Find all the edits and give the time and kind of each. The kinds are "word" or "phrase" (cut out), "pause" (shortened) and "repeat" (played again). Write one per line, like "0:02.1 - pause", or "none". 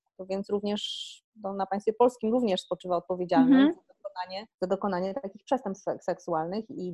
0:04.5 - pause